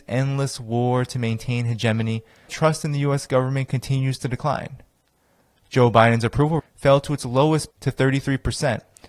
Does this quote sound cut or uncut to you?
cut